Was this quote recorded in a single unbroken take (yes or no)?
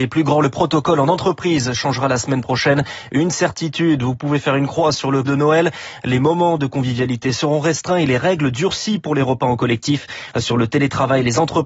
no